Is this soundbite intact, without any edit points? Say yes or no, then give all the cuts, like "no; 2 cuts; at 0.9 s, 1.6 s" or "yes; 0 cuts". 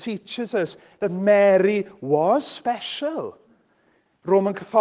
yes; 0 cuts